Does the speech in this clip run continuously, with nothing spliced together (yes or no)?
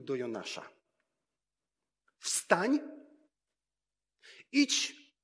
yes